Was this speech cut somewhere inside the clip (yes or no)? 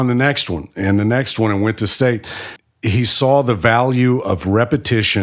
no